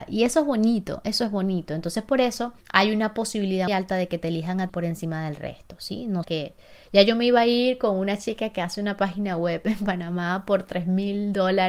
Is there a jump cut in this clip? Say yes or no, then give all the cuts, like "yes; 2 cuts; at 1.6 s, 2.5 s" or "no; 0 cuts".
yes; 4 cuts; at 2.6 s, 3.7 s, 4.7 s, 6.2 s